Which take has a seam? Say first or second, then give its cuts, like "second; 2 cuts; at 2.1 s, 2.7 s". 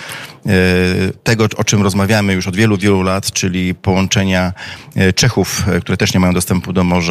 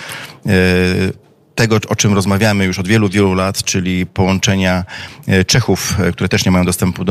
first; 1 cut; at 1.2 s